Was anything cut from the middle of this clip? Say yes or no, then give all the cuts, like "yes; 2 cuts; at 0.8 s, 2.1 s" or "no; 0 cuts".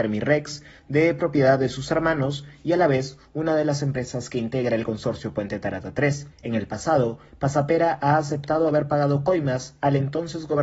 yes; 1 cut; at 6.3 s